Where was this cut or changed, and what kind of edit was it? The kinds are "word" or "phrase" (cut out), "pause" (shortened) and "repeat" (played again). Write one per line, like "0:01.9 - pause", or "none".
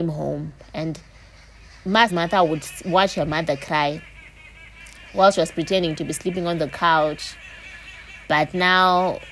0:02.1 - word